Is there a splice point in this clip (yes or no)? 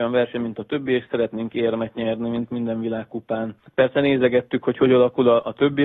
no